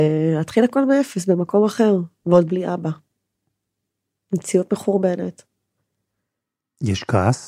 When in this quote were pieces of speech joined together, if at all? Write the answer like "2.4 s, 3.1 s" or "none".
none